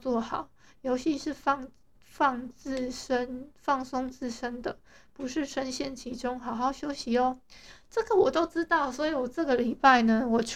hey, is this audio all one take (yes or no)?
yes